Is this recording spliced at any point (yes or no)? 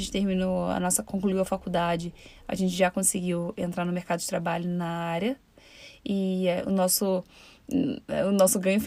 no